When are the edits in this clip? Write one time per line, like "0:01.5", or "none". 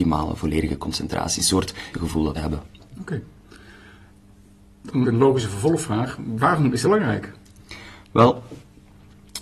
0:01.9
0:02.3
0:05.0
0:06.8